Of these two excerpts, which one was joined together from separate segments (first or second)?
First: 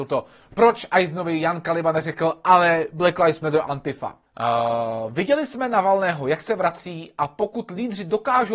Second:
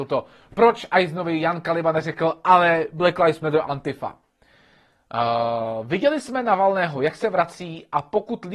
first